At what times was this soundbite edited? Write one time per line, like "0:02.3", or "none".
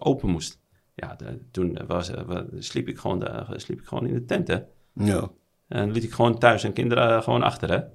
none